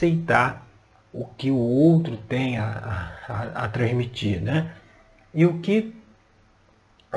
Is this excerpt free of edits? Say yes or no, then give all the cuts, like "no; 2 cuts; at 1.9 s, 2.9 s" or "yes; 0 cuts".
yes; 0 cuts